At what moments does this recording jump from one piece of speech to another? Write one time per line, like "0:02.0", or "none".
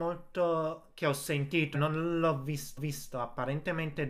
0:01.7
0:02.8